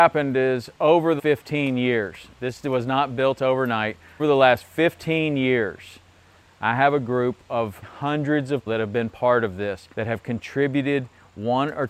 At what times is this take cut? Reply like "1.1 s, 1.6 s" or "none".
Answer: 1.2 s, 4.2 s, 7.8 s, 8.7 s, 9.9 s